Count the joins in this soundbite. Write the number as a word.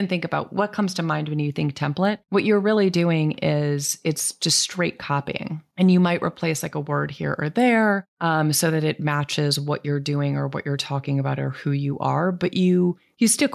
zero